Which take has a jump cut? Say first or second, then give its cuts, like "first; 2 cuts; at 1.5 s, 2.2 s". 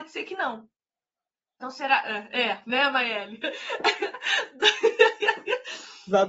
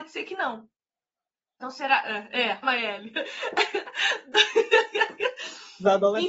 second; 1 cut; at 2.6 s